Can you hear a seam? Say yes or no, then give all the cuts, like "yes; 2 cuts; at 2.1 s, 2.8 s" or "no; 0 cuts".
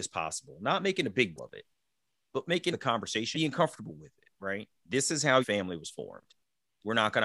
yes; 4 cuts; at 1.4 s, 2.7 s, 3.3 s, 5.4 s